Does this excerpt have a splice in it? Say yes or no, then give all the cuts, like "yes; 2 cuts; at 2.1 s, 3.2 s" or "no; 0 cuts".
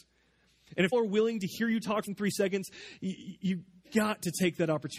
yes; 2 cuts; at 0.9 s, 2.1 s